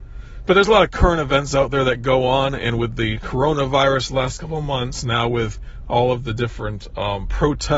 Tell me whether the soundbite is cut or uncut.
uncut